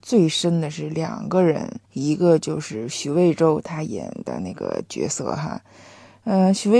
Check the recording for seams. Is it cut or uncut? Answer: cut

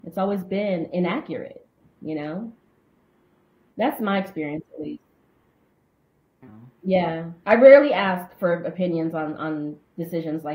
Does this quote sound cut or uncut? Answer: uncut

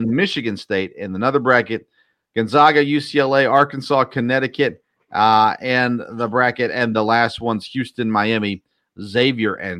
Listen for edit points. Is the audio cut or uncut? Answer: cut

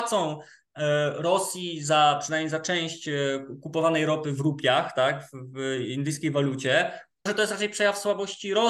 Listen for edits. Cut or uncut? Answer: cut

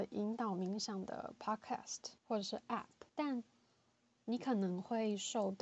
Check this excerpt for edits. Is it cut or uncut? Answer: cut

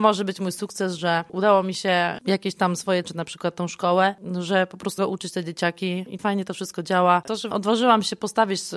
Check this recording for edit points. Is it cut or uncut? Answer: cut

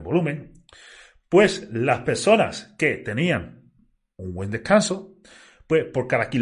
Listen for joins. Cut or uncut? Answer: uncut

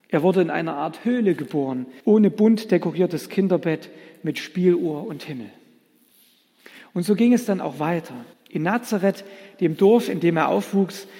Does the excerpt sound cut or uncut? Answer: cut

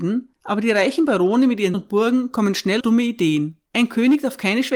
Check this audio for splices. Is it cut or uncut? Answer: cut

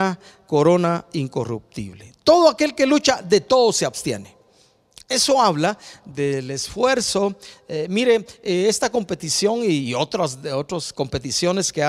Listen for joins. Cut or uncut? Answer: uncut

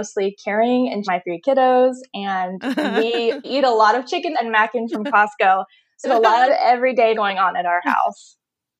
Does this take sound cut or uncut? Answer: cut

